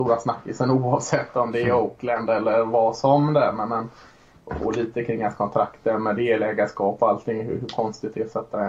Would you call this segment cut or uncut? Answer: uncut